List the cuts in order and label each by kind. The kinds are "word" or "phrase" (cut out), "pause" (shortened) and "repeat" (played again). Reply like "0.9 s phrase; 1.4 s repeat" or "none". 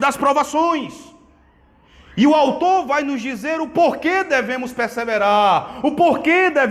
none